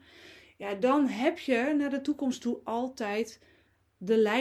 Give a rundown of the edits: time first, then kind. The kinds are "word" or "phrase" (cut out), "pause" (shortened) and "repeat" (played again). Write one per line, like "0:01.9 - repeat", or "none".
none